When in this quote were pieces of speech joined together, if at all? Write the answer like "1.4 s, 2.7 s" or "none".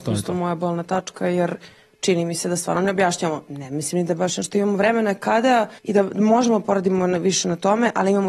5.8 s